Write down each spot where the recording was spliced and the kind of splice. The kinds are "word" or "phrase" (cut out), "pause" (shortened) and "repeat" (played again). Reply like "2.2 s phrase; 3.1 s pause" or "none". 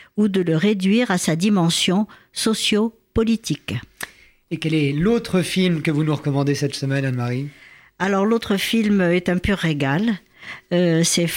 none